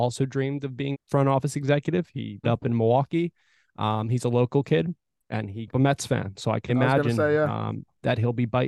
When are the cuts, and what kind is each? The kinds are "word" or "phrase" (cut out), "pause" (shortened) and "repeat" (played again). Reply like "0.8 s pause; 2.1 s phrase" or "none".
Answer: 0.9 s word; 2.4 s word; 5.2 s pause; 5.7 s word; 6.7 s word